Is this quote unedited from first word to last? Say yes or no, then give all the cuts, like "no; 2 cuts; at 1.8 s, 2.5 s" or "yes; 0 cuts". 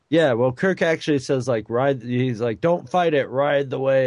yes; 0 cuts